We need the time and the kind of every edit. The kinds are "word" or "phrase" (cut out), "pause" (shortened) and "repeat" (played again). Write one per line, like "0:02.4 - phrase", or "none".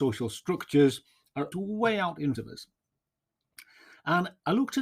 0:01.5 - word
0:02.3 - word